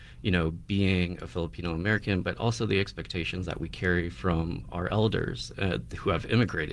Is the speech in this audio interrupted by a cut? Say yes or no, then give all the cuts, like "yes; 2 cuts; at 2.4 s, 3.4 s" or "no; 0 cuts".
no; 0 cuts